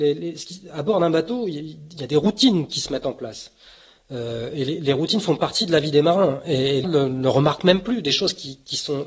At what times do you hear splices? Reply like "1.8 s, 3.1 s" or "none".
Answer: 6.8 s

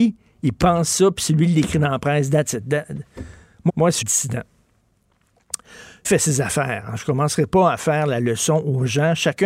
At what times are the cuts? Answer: 3.7 s, 4.0 s, 6.0 s

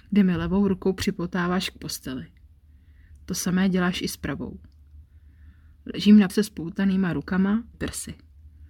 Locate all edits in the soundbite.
6.3 s, 7.7 s

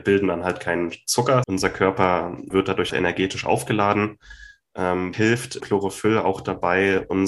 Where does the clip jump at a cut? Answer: 1.4 s, 2.5 s, 2.9 s, 5.1 s, 5.6 s

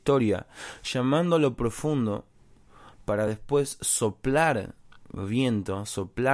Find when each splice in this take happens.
none

